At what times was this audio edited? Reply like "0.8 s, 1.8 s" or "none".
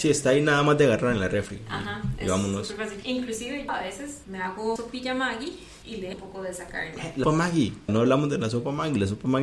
3.7 s, 4.8 s, 6.1 s, 7.2 s, 7.9 s